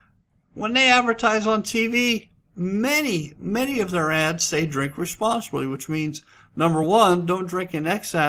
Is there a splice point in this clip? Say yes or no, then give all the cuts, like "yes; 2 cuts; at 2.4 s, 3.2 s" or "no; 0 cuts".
no; 0 cuts